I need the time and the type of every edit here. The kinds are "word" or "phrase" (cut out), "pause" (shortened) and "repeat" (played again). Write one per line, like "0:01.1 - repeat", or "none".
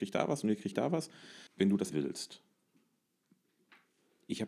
0:01.5 - pause
0:01.9 - word

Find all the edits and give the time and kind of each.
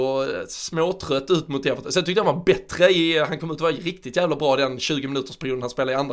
none

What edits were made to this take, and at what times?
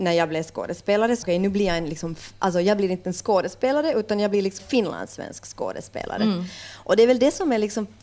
0:01.2 - phrase
0:04.6 - word

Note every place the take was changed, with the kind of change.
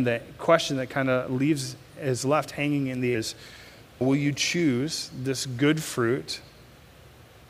0:03.1 - word
0:04.0 - word

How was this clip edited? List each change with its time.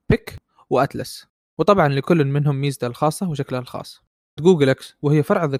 0:01.4 - pause
0:04.4 - word

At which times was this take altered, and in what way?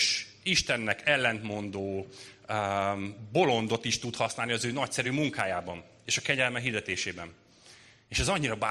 none

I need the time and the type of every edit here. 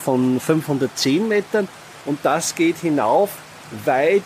none

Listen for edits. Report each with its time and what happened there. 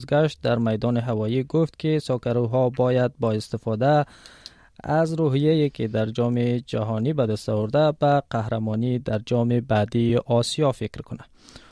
none

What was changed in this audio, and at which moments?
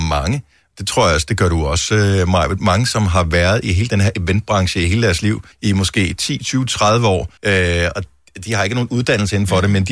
0:05.5 - pause
0:07.4 - pause

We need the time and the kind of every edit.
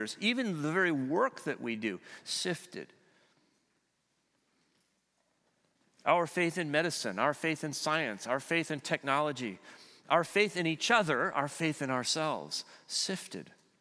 none

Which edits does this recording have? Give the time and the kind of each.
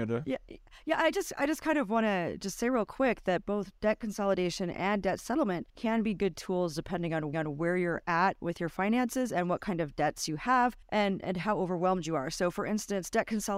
0:05.7 - pause
0:07.3 - repeat
0:10.8 - pause

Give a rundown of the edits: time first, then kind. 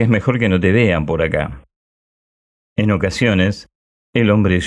none

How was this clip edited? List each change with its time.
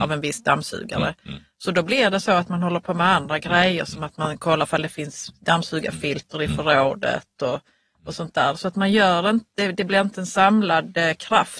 none

